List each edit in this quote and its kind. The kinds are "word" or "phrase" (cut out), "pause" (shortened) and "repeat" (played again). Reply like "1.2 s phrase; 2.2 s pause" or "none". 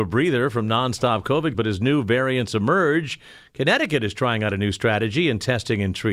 1.5 s word